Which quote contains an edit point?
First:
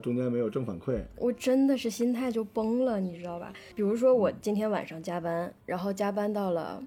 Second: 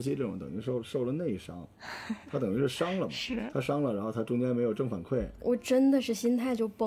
first; 1 cut; at 5.6 s

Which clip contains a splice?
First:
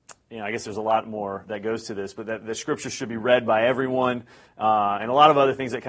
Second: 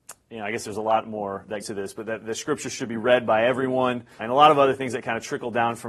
second; 2 cuts; at 1.6 s, 4.2 s

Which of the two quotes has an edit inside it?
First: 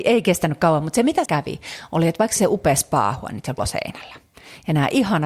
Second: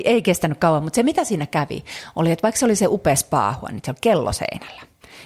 first; 3 cuts; at 1.2 s, 2.4 s, 3.6 s

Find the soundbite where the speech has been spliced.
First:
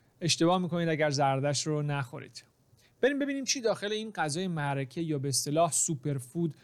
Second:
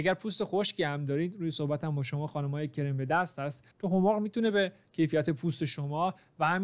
second; 1 cut; at 3.7 s

